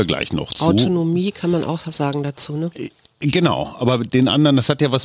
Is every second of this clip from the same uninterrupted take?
yes; 0 cuts

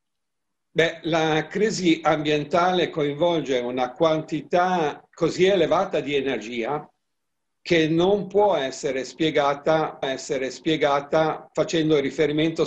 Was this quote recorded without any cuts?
no; 1 cut; at 10.0 s

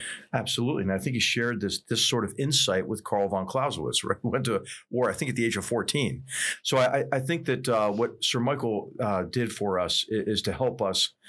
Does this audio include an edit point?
no; 0 cuts

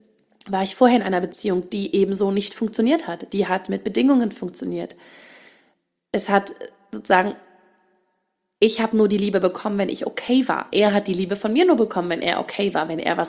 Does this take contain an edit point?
no; 0 cuts

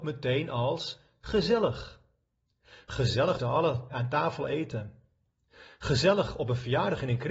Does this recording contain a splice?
yes; 1 cut; at 3.4 s

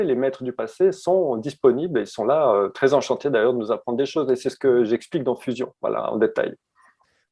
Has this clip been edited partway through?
no; 0 cuts

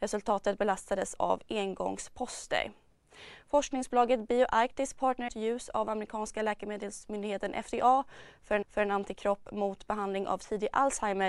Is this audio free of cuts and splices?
no; 3 cuts; at 1.2 s, 5.3 s, 8.6 s

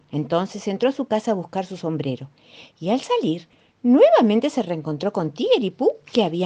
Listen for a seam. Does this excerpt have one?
no; 0 cuts

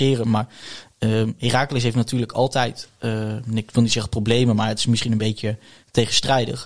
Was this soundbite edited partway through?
no; 0 cuts

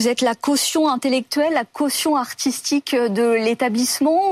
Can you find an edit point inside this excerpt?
no; 0 cuts

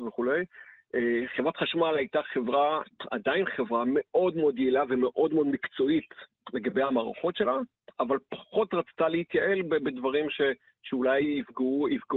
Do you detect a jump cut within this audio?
no; 0 cuts

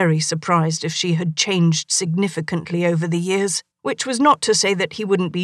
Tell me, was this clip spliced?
yes; 1 cut; at 3.7 s

